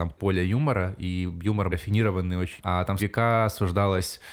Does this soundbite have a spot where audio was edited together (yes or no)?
yes